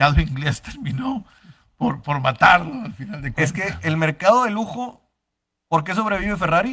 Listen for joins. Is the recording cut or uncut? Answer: uncut